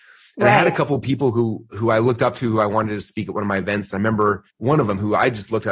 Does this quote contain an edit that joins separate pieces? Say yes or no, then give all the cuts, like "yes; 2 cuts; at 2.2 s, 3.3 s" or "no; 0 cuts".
yes; 1 cut; at 4.5 s